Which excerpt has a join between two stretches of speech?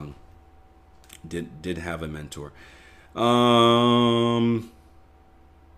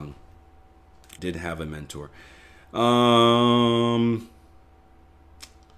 second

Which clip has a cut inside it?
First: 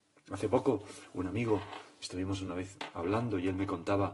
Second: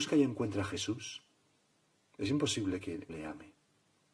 second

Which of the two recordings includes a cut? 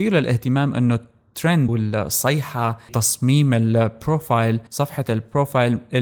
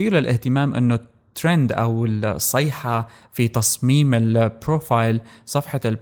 first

